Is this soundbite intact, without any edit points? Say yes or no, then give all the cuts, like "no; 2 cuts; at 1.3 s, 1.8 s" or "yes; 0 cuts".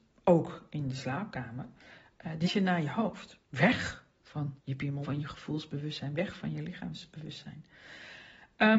no; 4 cuts; at 2.4 s, 3.4 s, 4.6 s, 5.0 s